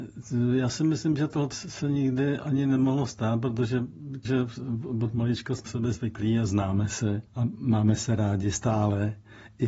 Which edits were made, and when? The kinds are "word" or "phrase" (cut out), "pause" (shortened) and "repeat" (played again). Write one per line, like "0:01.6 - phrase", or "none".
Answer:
0:01.5 - word
0:04.2 - word
0:05.7 - phrase
0:07.3 - pause

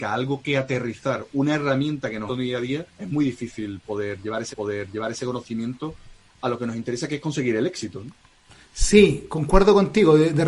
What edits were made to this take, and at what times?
0:02.3 - phrase
0:02.9 - pause
0:04.5 - repeat

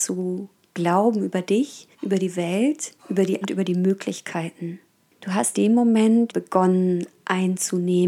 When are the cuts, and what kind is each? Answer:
0:01.9 - pause
0:03.0 - pause
0:03.4 - word
0:05.5 - word
0:06.3 - phrase

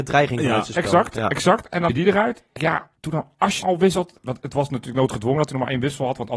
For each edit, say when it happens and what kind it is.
0:01.9 - word
0:02.6 - phrase
0:03.0 - pause
0:03.6 - word

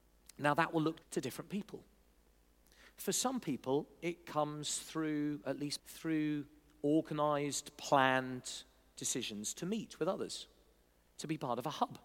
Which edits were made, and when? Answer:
0:01.0 - word
0:05.8 - word

